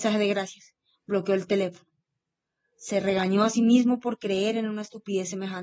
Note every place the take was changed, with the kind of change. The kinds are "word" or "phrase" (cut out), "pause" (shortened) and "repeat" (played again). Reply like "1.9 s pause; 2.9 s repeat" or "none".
none